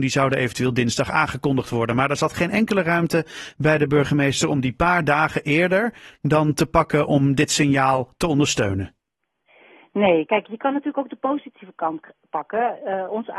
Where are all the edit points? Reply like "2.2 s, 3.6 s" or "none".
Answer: none